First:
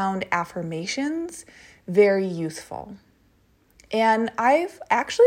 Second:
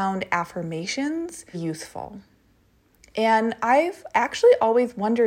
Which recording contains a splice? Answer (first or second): second